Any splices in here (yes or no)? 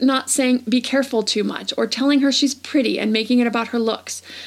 no